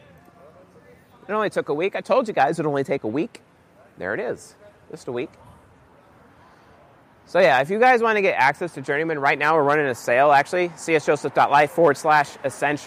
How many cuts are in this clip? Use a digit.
0